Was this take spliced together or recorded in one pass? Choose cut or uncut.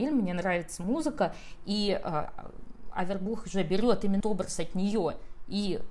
cut